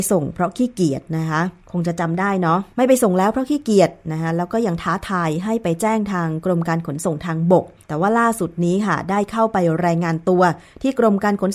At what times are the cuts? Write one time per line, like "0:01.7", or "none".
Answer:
0:01.6
0:02.7
0:07.8